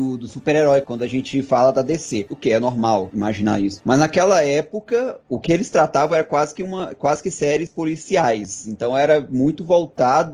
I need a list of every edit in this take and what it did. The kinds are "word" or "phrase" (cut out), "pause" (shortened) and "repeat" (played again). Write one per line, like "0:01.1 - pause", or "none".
none